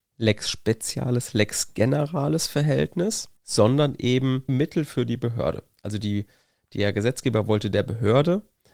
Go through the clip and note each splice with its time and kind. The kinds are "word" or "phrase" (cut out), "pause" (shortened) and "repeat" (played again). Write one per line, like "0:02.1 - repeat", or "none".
0:03.4 - pause
0:04.5 - phrase